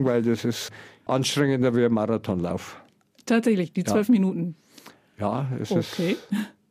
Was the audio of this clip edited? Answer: no; 0 cuts

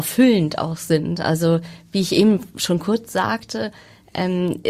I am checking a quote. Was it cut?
no; 0 cuts

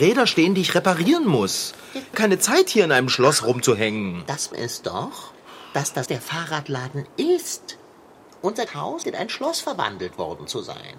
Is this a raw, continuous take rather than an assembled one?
no; 5 cuts; at 2.1 s, 4.5 s, 6.1 s, 8.7 s, 9.0 s

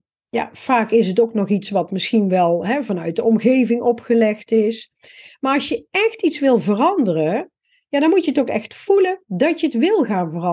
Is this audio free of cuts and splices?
yes; 0 cuts

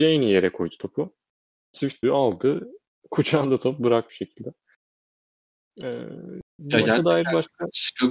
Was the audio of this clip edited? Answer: yes; 2 cuts; at 2.0 s, 4.1 s

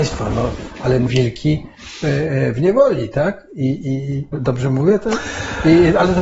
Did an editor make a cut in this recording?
yes; 2 cuts; at 1.1 s, 4.3 s

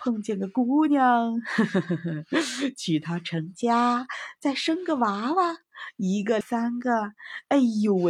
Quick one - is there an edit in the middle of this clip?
yes; 1 cut; at 6.4 s

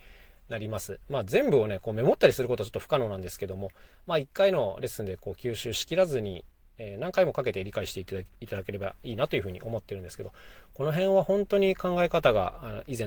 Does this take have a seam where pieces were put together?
no; 0 cuts

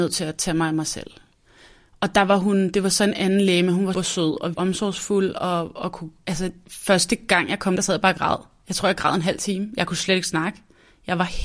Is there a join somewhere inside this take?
yes; 3 cuts; at 3.9 s, 4.5 s, 7.8 s

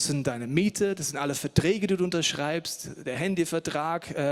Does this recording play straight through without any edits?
yes; 0 cuts

